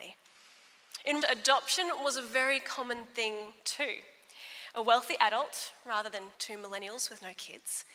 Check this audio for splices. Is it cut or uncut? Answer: cut